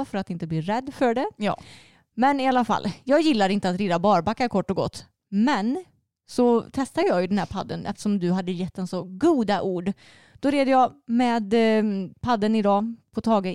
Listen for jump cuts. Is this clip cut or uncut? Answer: uncut